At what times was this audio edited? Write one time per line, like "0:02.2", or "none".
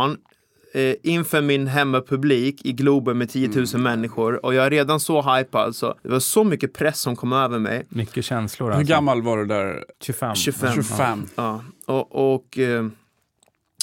0:06.0
0:09.9